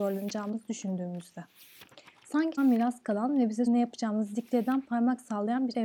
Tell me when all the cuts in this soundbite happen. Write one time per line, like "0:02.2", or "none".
0:02.6
0:03.7

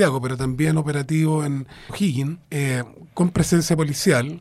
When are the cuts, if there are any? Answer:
0:01.9
0:02.4

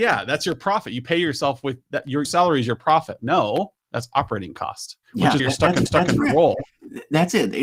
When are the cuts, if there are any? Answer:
0:02.2
0:03.2
0:03.8
0:05.0
0:05.4
0:05.9

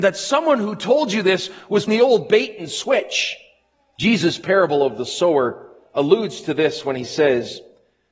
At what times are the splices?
0:01.9
0:03.7

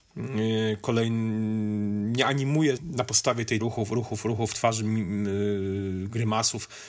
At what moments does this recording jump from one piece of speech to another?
0:02.8
0:03.6

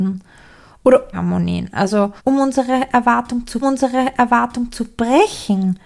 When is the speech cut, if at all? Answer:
0:01.1
0:02.2
0:03.6

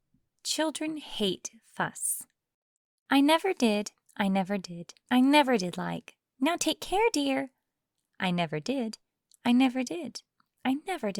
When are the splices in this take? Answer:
none

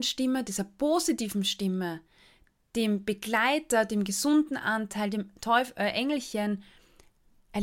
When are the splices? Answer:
none

